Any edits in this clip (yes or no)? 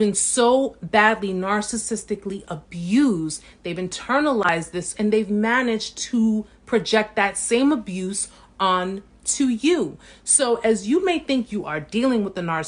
yes